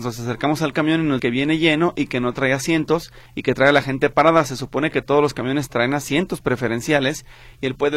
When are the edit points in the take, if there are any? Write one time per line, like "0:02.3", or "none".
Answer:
0:01.2
0:03.3